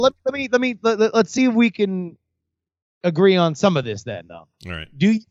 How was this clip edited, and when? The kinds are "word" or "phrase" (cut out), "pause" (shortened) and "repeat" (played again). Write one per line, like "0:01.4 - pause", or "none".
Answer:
none